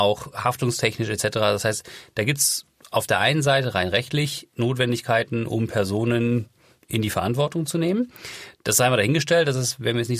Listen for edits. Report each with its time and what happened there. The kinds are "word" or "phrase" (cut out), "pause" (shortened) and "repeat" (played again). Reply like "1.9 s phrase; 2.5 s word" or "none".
none